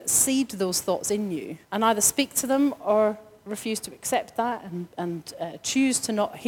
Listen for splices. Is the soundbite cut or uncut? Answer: cut